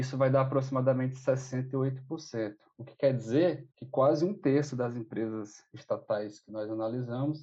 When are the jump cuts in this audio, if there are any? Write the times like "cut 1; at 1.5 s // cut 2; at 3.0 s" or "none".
cut 1; at 3.7 s